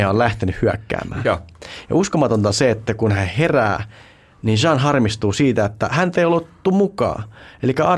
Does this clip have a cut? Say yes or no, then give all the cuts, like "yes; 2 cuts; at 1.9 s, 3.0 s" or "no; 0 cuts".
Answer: no; 0 cuts